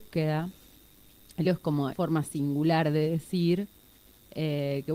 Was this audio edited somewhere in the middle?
yes; 2 cuts; at 1.4 s, 1.9 s

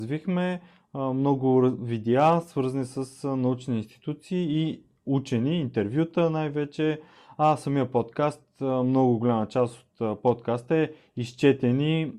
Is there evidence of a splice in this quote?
no; 0 cuts

